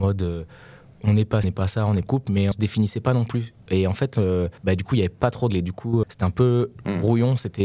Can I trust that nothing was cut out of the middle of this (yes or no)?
no